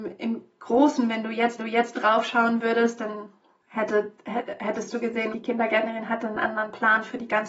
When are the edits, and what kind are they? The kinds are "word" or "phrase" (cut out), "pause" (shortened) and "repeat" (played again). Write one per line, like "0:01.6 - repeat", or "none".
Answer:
0:01.6 - repeat
0:03.6 - pause
0:05.3 - word